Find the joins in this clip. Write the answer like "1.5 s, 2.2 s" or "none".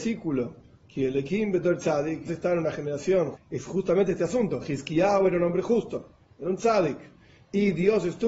2.3 s, 3.3 s